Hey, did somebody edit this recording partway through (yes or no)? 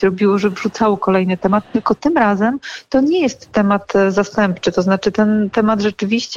no